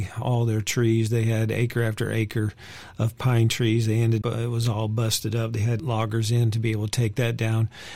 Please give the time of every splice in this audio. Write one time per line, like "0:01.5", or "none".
0:04.2
0:05.8